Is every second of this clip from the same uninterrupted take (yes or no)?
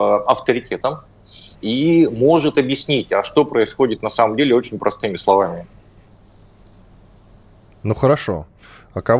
no